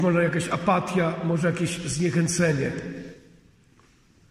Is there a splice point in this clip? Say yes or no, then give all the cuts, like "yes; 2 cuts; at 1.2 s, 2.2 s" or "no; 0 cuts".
no; 0 cuts